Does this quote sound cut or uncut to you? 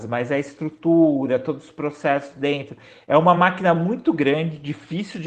uncut